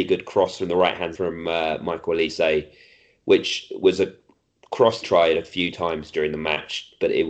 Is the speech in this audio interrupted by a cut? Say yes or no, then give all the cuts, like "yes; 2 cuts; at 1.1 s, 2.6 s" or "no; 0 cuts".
yes; 2 cuts; at 1.1 s, 5.0 s